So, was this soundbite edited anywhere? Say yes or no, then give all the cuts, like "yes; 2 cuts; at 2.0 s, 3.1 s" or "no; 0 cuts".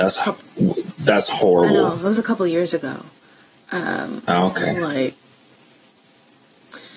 no; 0 cuts